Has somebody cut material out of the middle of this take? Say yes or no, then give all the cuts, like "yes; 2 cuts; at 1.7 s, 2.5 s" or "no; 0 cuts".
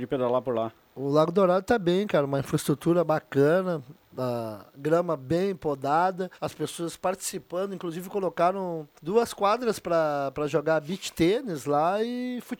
yes; 2 cuts; at 6.3 s, 9.0 s